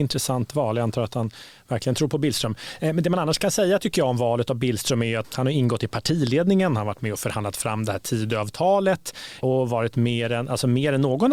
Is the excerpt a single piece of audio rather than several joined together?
no; 1 cut; at 5.2 s

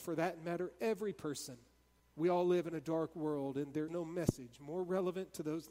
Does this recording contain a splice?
yes; 2 cuts; at 2.0 s, 3.9 s

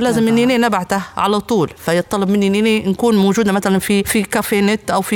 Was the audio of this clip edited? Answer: no; 0 cuts

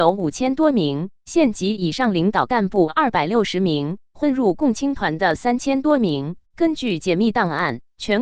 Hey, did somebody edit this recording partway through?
yes; 1 cut; at 6.4 s

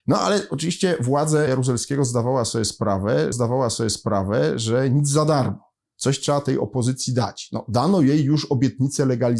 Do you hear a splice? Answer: yes; 2 cuts; at 1.5 s, 3.3 s

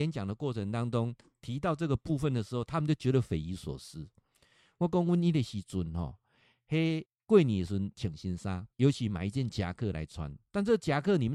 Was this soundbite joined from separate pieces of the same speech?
yes; 2 cuts; at 7.0 s, 8.7 s

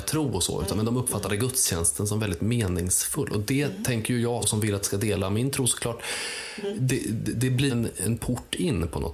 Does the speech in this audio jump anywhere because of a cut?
yes; 3 cuts; at 4.4 s, 4.8 s, 7.7 s

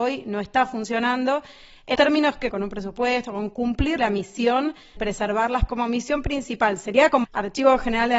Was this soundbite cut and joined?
yes; 6 cuts; at 2.0 s, 2.5 s, 4.0 s, 5.0 s, 5.7 s, 7.2 s

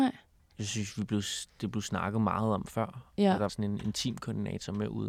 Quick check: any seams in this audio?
yes; 2 cuts; at 1.5 s, 3.5 s

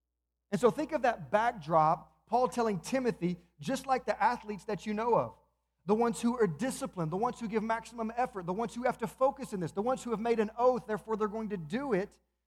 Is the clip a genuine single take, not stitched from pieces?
yes; 0 cuts

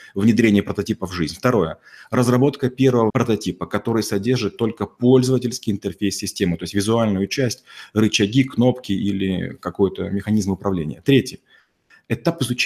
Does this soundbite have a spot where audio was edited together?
yes; 1 cut; at 3.1 s

